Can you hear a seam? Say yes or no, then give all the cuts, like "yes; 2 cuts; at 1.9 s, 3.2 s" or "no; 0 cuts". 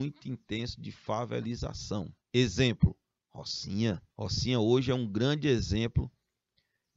yes; 2 cuts; at 2.2 s, 4.1 s